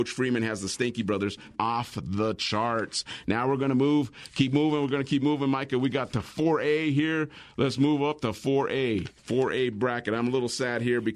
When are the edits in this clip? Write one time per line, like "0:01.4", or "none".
0:01.6
0:09.2